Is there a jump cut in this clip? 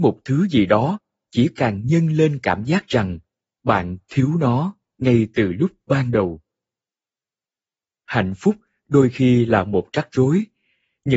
no; 0 cuts

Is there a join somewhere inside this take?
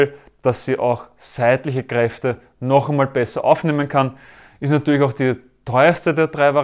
no; 0 cuts

